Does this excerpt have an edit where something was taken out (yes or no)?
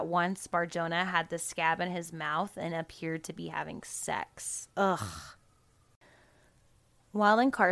yes